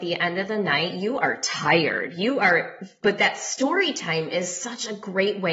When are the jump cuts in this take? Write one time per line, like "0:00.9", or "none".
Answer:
none

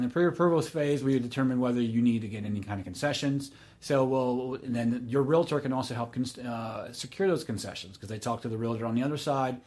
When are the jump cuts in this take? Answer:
none

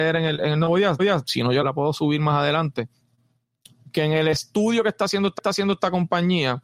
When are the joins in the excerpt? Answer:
0:01.0
0:01.6
0:05.4

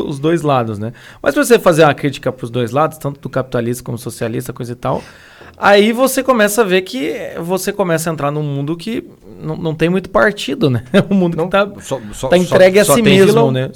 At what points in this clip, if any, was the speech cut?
none

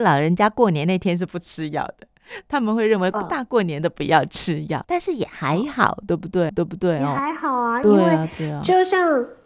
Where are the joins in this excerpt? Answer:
0:04.8
0:06.5

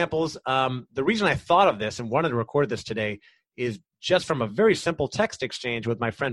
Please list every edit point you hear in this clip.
none

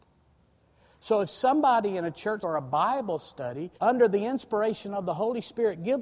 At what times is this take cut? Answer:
0:02.4
0:03.8

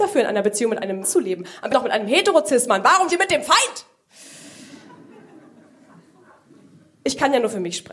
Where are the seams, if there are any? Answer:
0:01.0
0:01.7
0:03.1

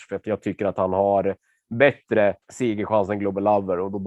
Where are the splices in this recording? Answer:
0:02.4

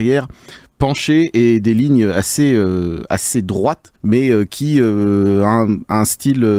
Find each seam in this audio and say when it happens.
0:04.0

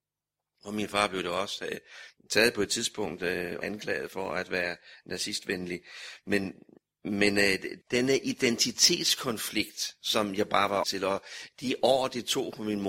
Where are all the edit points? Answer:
0:03.6
0:07.8
0:10.8

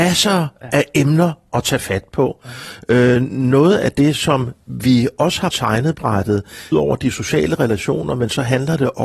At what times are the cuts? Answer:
0:05.5
0:06.7

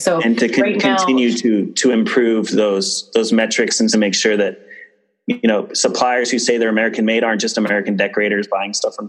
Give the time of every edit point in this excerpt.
0:03.9

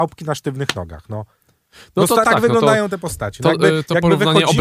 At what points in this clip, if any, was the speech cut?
0:02.2

